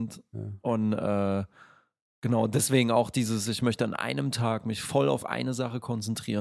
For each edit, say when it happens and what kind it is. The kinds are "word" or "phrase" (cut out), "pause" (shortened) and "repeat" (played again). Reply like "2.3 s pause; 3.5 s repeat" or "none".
none